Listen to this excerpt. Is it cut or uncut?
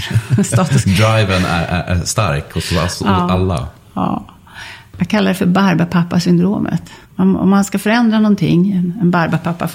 cut